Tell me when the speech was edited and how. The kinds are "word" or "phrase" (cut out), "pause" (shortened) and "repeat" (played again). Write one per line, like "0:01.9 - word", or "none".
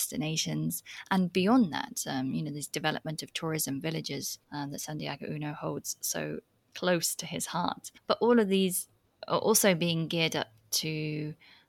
0:04.4 - pause